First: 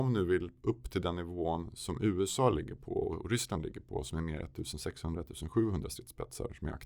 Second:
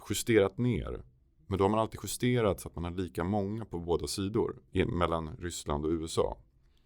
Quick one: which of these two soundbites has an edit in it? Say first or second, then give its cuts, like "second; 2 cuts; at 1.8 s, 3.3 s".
second; 1 cut; at 4.7 s